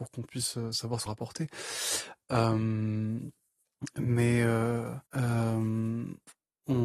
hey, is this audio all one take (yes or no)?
no